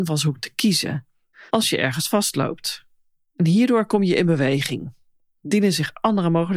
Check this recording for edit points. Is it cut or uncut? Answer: uncut